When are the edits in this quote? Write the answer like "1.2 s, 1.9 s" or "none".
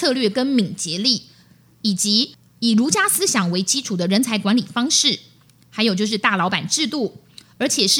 none